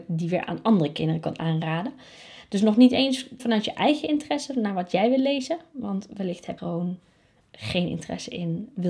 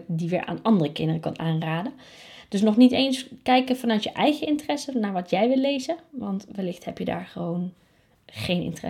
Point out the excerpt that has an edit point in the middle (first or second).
first